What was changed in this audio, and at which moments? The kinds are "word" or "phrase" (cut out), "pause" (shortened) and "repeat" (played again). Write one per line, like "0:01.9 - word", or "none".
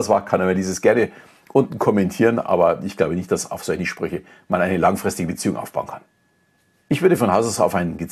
none